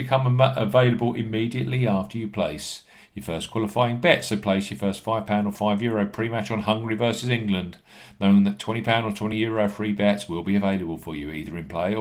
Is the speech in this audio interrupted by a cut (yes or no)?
no